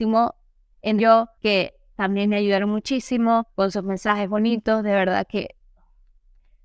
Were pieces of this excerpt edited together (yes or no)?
yes